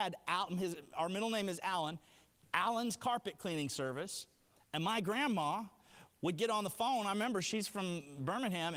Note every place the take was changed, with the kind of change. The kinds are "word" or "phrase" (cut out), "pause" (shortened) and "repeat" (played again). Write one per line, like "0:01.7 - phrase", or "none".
none